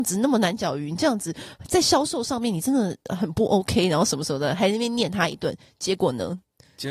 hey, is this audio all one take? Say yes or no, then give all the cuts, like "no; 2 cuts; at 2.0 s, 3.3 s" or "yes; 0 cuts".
yes; 0 cuts